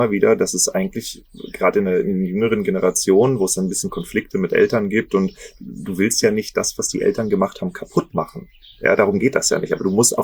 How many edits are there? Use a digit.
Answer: 0